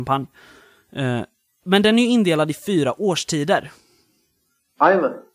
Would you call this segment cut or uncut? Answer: uncut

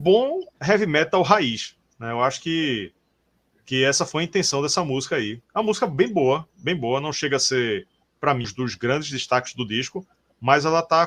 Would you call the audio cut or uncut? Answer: cut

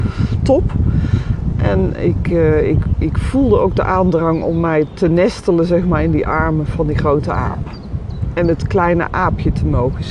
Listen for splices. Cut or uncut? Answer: uncut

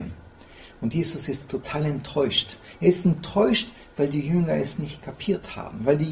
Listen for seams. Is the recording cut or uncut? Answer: uncut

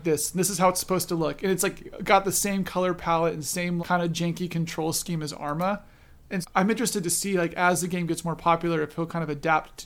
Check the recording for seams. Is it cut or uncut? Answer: cut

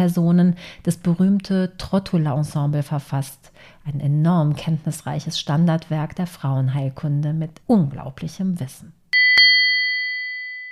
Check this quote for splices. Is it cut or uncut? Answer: cut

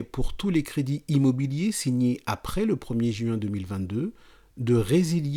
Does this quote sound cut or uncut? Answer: uncut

